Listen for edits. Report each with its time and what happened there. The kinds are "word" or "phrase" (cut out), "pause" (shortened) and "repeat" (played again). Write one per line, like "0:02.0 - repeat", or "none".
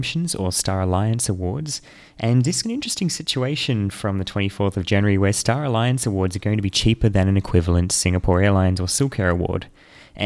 0:02.6 - word